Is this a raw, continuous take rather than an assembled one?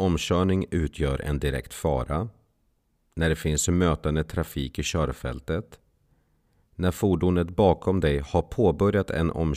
yes; 0 cuts

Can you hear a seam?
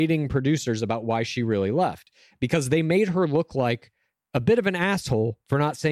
no; 0 cuts

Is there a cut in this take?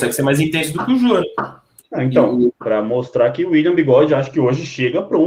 no; 0 cuts

